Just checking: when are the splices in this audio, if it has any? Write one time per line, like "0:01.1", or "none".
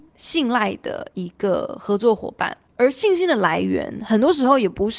0:02.7